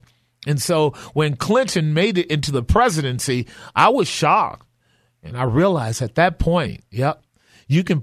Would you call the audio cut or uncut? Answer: uncut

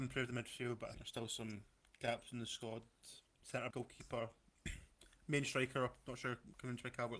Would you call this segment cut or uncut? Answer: cut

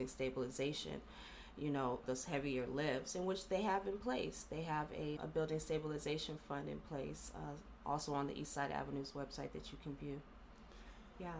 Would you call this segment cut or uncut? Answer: cut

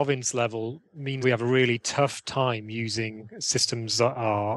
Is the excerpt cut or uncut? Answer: cut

